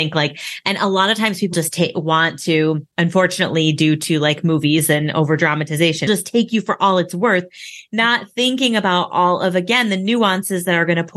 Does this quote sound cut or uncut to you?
cut